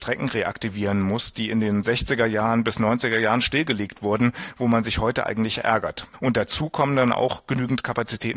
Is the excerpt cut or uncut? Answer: uncut